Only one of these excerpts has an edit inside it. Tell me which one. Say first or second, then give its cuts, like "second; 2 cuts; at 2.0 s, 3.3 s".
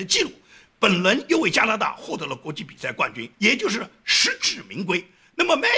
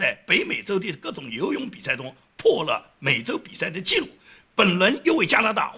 first; 1 cut; at 3.3 s